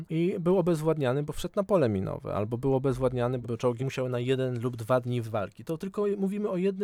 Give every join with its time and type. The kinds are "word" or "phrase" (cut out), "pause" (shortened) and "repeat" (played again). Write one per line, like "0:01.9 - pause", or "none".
0:03.4 - word
0:03.8 - phrase
0:05.2 - word